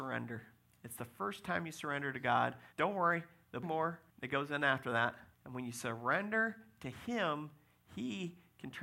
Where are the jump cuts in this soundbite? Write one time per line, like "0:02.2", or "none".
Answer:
0:02.7
0:03.6
0:04.1
0:05.3